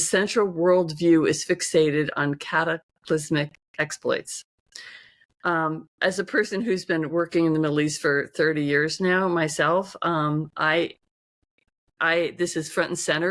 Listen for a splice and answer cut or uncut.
uncut